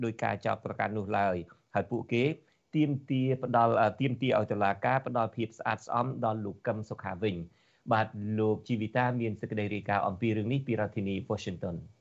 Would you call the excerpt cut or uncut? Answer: uncut